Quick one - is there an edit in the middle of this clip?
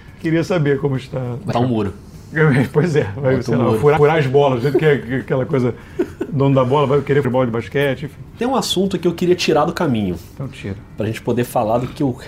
yes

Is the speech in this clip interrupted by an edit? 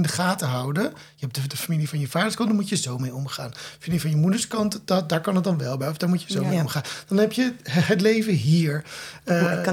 no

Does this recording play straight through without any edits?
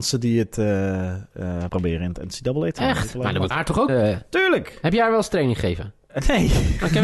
no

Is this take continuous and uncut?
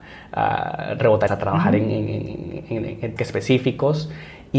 no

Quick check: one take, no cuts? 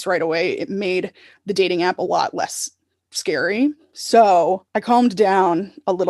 yes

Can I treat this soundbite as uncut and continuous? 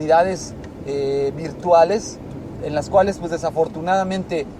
no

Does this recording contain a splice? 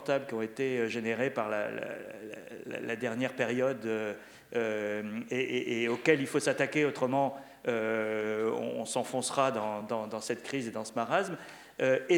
no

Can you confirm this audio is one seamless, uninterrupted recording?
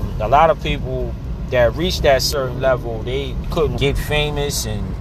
no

